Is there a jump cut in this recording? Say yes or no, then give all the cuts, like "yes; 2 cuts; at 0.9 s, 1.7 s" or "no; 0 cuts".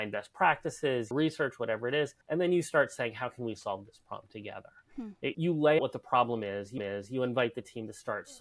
yes; 5 cuts; at 1.1 s, 2.2 s, 5.3 s, 5.8 s, 6.8 s